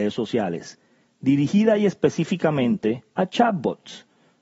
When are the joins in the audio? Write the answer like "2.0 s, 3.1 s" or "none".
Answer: 3.1 s